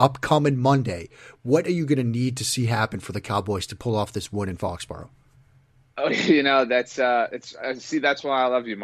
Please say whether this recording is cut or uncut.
uncut